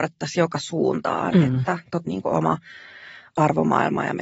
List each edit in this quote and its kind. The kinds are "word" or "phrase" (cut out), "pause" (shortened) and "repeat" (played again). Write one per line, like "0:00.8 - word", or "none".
0:02.1 - phrase